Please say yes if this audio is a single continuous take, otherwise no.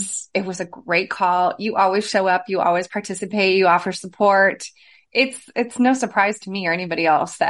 yes